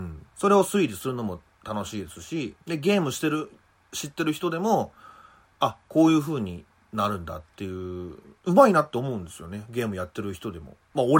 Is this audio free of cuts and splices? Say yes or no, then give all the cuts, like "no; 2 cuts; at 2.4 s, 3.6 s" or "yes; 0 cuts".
no; 1 cut; at 2.6 s